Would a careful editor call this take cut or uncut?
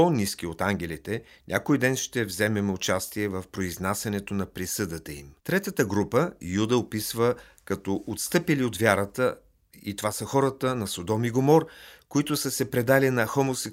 cut